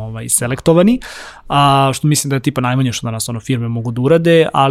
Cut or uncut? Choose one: uncut